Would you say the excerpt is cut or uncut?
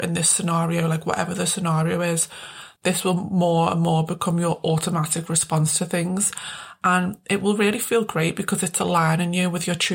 cut